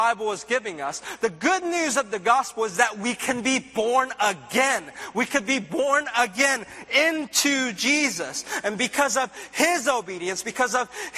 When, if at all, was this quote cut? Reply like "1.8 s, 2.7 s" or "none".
none